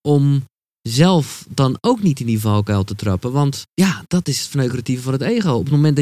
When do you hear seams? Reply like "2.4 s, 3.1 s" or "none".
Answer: 3.7 s